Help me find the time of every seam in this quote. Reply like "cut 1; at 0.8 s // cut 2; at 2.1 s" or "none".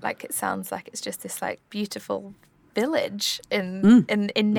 none